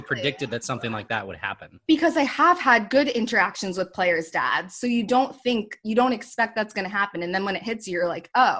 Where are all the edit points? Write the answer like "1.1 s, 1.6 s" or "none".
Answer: none